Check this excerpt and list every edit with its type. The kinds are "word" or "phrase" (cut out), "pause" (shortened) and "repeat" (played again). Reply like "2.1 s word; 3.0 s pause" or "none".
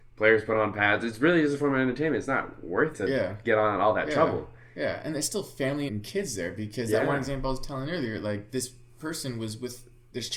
2.9 s word; 5.9 s word